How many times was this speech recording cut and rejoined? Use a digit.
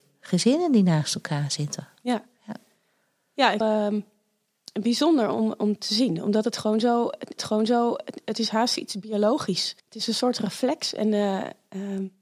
3